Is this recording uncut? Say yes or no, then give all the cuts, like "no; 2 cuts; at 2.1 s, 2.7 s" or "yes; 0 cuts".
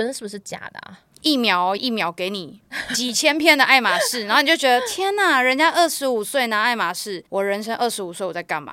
no; 2 cuts; at 1.8 s, 7.3 s